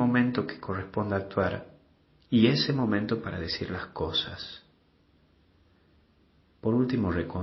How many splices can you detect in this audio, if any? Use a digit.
0